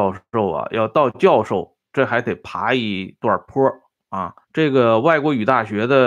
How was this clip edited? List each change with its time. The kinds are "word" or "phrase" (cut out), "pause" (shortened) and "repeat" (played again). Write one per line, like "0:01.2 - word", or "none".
0:04.4 - pause